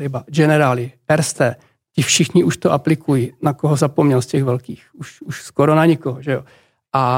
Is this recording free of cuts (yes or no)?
no